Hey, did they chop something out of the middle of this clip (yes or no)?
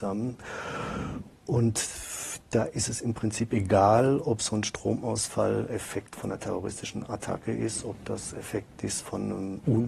no